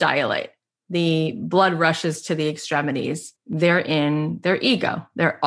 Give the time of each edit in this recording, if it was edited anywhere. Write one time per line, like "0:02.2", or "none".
0:03.3